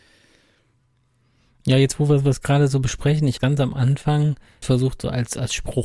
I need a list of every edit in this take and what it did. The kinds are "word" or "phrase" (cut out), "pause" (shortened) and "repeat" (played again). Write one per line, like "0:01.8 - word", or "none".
0:03.4 - phrase
0:04.6 - word